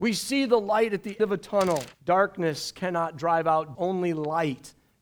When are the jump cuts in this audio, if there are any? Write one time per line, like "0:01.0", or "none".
0:01.2
0:01.9
0:03.7